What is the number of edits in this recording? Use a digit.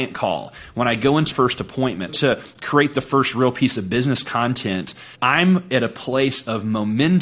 3